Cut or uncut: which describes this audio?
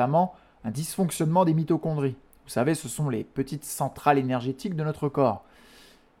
uncut